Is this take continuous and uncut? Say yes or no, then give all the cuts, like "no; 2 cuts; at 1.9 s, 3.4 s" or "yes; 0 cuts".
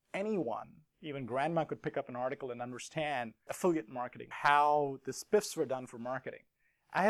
no; 2 cuts; at 3.5 s, 4.3 s